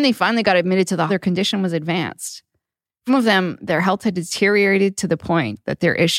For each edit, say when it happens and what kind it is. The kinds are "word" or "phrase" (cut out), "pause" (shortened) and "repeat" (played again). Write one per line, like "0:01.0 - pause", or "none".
0:01.1 - word
0:03.1 - word